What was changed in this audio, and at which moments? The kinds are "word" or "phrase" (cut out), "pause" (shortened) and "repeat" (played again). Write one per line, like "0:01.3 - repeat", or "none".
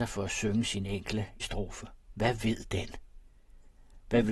0:01.4 - word
0:02.0 - pause

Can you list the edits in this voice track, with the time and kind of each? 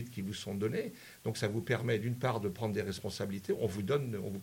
none

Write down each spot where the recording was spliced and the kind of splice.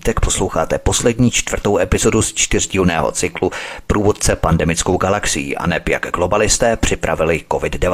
none

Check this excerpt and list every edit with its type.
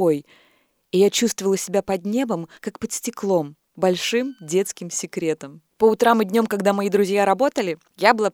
0:02.5 - pause
0:03.6 - pause
0:05.7 - pause

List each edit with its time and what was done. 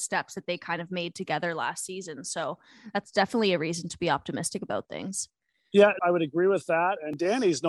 0:06.0 - word

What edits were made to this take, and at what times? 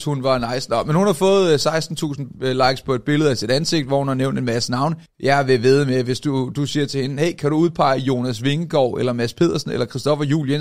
0:05.1 - pause

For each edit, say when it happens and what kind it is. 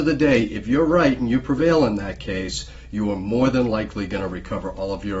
none

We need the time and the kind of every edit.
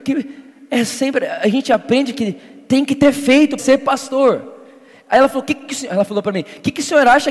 0:03.6 - phrase

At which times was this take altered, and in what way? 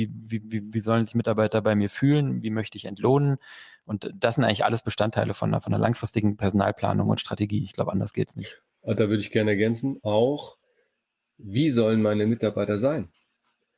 none

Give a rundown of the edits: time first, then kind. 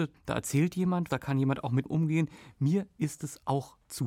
0:01.1 - word
0:01.9 - word

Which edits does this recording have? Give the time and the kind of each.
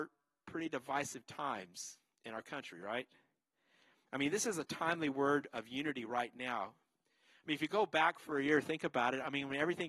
none

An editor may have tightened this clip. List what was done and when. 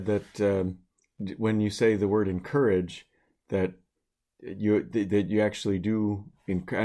none

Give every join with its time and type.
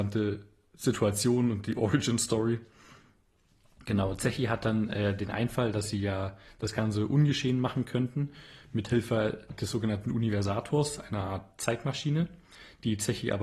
none

